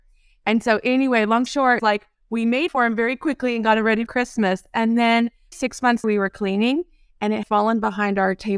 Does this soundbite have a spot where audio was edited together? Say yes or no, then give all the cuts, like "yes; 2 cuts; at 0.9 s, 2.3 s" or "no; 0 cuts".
yes; 7 cuts; at 1.5 s, 1.8 s, 2.7 s, 4.1 s, 5.5 s, 6.0 s, 7.4 s